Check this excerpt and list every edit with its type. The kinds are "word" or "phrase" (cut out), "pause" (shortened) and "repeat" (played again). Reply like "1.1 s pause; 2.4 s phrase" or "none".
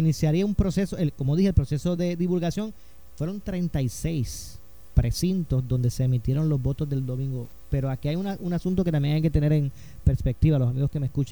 none